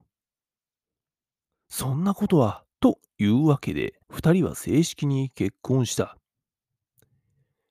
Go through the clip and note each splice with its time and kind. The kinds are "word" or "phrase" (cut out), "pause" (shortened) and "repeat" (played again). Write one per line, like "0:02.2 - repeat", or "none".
0:02.7 - pause
0:04.0 - pause